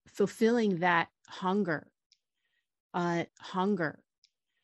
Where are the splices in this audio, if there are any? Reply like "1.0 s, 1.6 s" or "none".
3.3 s